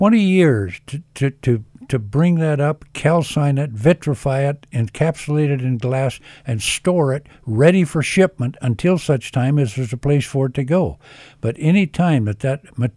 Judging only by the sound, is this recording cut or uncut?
uncut